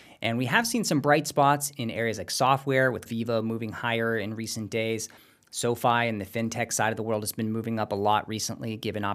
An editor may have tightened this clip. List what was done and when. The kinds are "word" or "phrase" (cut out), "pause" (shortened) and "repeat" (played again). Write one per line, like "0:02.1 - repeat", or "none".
0:03.1 - word